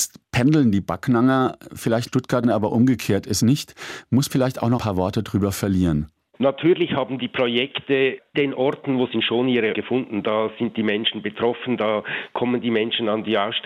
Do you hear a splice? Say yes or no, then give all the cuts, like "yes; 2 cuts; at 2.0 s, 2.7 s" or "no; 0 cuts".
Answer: yes; 8 cuts; at 2.1 s, 2.4 s, 3.4 s, 4.3 s, 4.8 s, 8.3 s, 9.1 s, 9.7 s